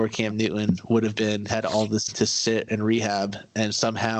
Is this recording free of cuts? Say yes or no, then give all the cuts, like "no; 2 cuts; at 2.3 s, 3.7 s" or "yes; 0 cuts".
no; 3 cuts; at 1.5 s, 2.1 s, 2.7 s